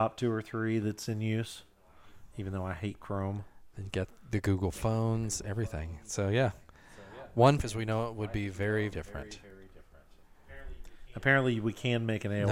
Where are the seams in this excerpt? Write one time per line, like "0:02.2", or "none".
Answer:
0:07.6
0:08.9